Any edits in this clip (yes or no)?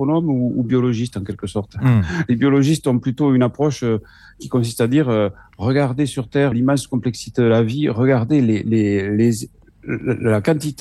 yes